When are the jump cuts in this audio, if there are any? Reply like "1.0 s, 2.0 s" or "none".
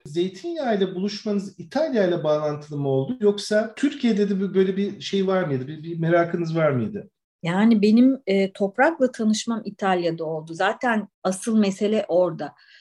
11.1 s